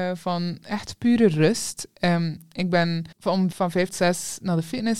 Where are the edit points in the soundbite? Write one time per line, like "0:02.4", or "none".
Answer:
0:03.1
0:03.5
0:03.9